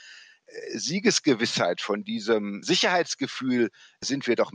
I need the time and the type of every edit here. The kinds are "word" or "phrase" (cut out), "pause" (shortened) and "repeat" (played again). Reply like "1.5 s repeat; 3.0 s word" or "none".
2.6 s word

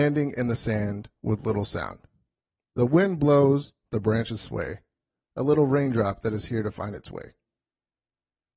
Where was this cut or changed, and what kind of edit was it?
none

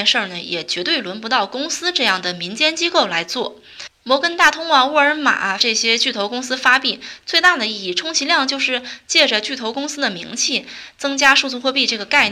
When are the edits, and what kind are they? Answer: 4.0 s pause; 5.6 s word

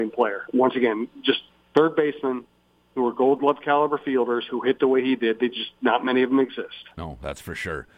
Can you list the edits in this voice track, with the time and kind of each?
none

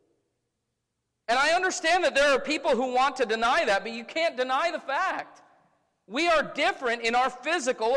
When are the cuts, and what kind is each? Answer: none

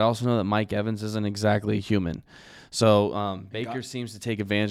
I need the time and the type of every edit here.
none

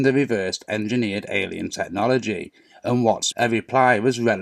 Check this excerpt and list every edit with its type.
3.3 s word

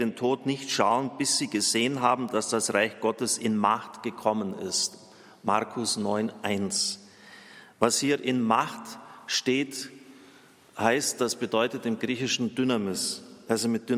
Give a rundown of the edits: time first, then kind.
none

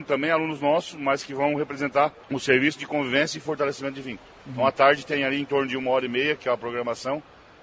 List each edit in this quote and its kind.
2.2 s pause; 4.4 s pause

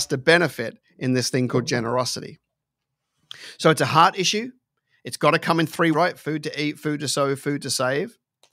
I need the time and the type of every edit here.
5.9 s word

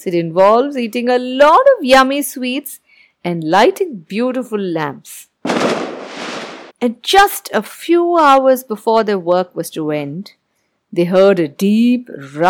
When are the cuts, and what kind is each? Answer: 6.7 s pause

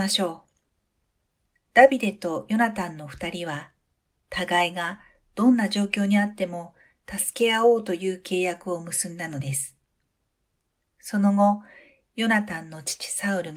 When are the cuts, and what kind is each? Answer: none

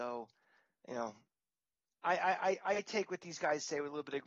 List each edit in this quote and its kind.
none

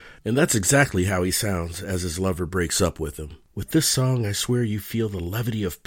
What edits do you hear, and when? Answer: 3.4 s pause

